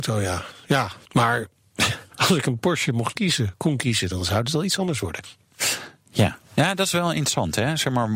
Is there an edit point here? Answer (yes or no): yes